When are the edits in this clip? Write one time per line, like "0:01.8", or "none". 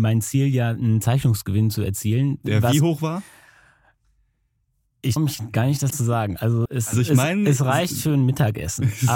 0:05.2
0:05.9
0:06.7